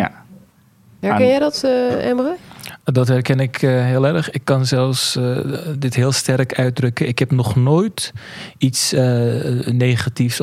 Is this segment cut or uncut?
uncut